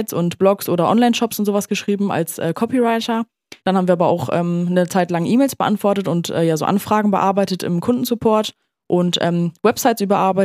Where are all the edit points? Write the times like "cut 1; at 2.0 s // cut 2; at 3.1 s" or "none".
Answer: cut 1; at 3.6 s // cut 2; at 8.6 s

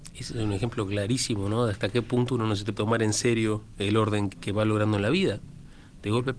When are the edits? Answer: cut 1; at 2.7 s // cut 2; at 4.3 s

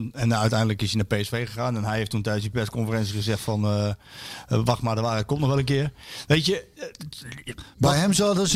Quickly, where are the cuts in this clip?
none

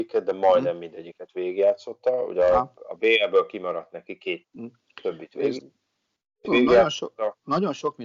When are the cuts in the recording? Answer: cut 1; at 4.4 s // cut 2; at 6.4 s

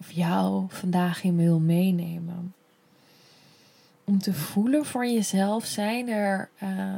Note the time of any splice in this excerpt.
none

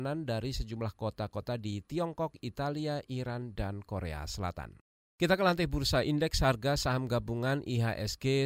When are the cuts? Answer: cut 1; at 4.9 s

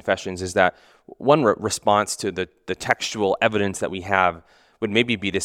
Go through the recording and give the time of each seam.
none

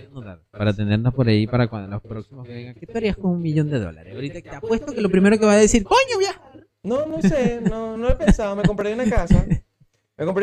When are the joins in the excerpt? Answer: cut 1; at 8.0 s

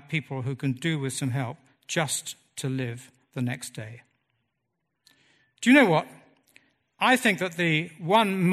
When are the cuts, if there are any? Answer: none

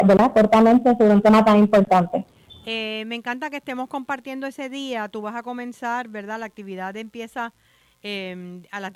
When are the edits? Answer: none

